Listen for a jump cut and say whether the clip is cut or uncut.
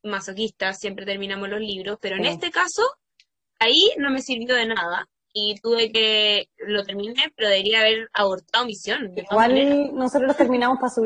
uncut